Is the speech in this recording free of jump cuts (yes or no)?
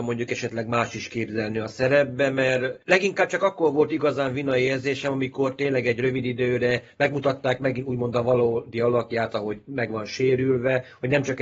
yes